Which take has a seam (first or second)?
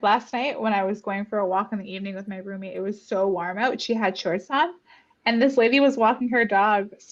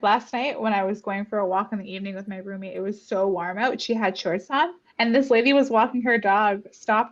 second